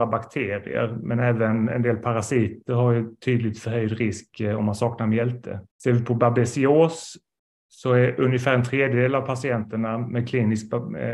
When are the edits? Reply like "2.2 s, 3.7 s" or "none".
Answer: 5.7 s